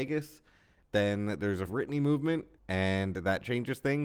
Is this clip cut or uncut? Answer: cut